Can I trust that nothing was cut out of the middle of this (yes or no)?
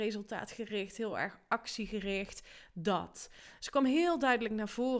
yes